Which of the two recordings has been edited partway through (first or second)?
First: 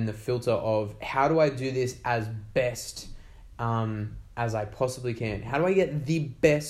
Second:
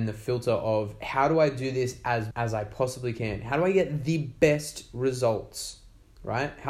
second